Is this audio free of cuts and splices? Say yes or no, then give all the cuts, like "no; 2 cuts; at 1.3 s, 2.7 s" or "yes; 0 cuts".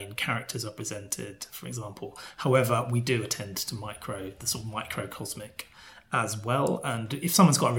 no; 1 cut; at 4.4 s